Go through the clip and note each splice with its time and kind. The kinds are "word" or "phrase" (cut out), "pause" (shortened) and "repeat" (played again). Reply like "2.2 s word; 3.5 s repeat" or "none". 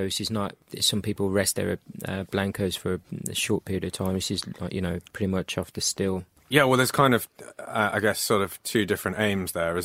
5.0 s pause

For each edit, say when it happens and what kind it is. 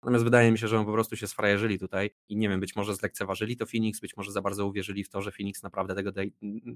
2.2 s pause

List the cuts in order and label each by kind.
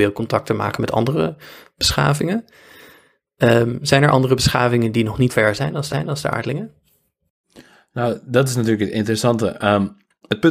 5.3 s word; 5.9 s repeat

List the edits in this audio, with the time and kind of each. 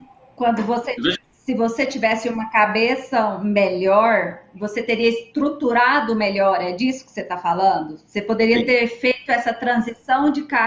1.2 s pause

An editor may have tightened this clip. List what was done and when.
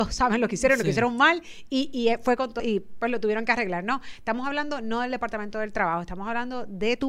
2.6 s phrase

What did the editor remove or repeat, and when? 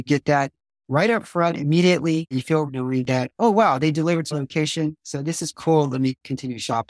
2.7 s word; 4.3 s word; 5.5 s word

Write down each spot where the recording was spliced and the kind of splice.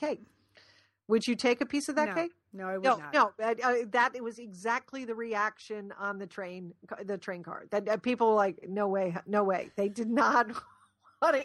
none

